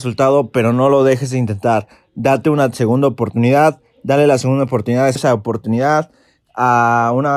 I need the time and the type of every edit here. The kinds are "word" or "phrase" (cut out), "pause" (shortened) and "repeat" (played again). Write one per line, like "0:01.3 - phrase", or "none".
0:05.2 - word